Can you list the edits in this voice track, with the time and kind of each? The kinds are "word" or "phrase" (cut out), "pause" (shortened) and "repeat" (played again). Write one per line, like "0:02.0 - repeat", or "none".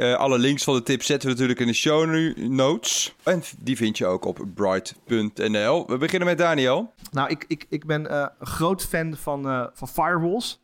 0:03.2 - pause